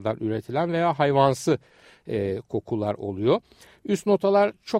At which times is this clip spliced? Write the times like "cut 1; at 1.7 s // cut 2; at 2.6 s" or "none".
none